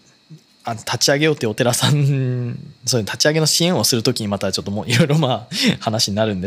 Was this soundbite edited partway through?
no; 0 cuts

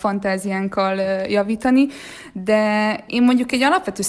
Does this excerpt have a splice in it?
yes; 1 cut; at 3.1 s

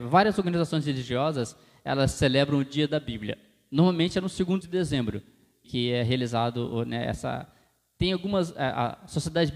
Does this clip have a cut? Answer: yes; 2 cuts; at 4.6 s, 5.6 s

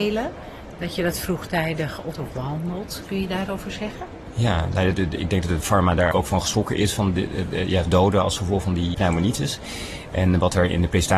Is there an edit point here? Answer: yes; 6 cuts; at 2.1 s, 3.5 s, 4.9 s, 6.1 s, 7.9 s, 8.9 s

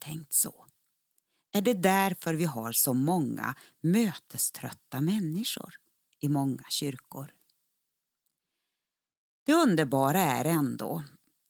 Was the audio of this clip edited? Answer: no; 0 cuts

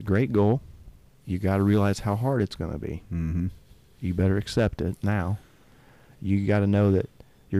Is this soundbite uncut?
yes; 0 cuts

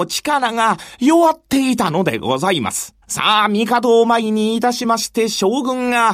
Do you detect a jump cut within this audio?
yes; 1 cut; at 3.0 s

